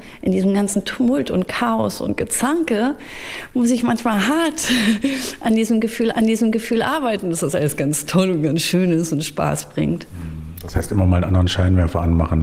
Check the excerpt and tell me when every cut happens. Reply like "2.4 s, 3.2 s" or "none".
6.1 s